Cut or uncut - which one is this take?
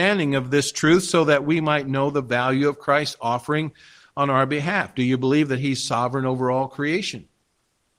uncut